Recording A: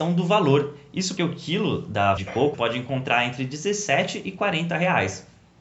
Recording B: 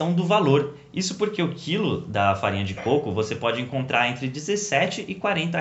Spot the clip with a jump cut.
A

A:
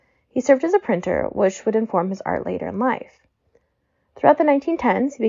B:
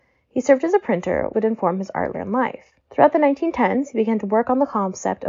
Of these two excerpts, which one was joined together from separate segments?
B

